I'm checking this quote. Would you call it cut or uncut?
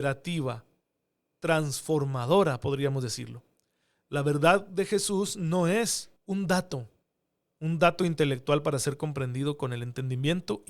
cut